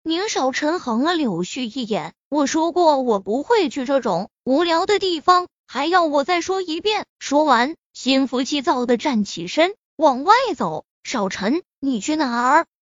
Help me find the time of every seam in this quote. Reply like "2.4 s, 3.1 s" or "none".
7.1 s, 10.9 s

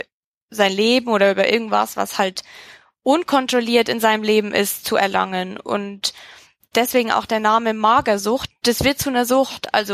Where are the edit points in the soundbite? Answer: none

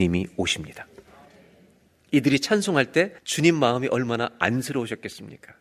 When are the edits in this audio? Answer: 3.2 s

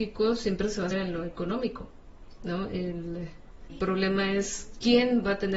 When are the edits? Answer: 0.9 s, 3.7 s

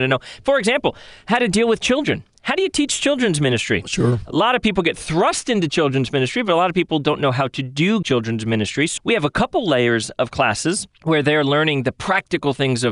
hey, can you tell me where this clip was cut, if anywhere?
8.0 s, 9.0 s, 10.9 s

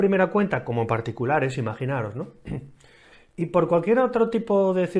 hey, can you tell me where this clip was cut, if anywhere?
none

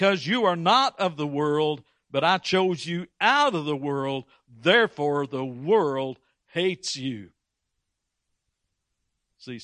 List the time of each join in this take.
none

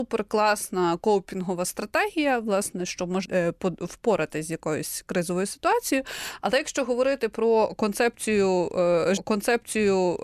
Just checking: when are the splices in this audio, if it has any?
2.9 s, 3.2 s, 9.2 s

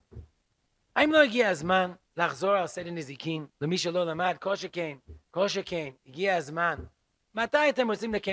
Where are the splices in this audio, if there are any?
2.0 s, 3.5 s, 5.2 s

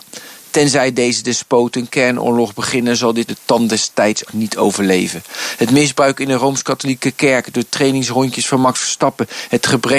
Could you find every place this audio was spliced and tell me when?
3.3 s, 4.3 s

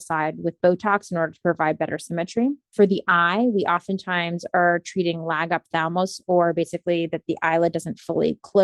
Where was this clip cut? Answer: none

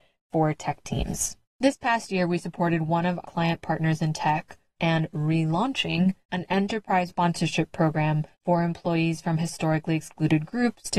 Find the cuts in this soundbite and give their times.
1.4 s, 3.2 s, 4.8 s, 6.2 s, 7.1 s, 8.3 s

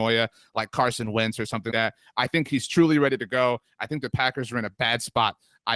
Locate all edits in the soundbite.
1.7 s

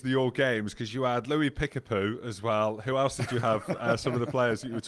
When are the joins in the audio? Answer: none

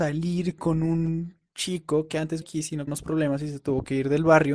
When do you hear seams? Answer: 2.4 s, 2.9 s

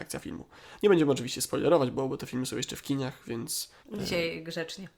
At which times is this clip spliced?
3.8 s

